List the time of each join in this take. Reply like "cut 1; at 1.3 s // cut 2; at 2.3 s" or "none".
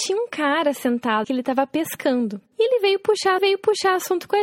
cut 1; at 1.2 s // cut 2; at 3.4 s